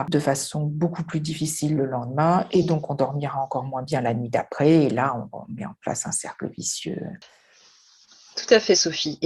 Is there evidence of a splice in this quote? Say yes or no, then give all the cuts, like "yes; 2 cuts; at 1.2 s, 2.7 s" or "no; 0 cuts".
no; 0 cuts